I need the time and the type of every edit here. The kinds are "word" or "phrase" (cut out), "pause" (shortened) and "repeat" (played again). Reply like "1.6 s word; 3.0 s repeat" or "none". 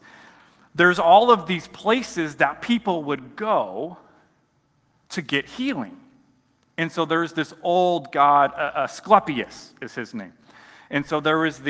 none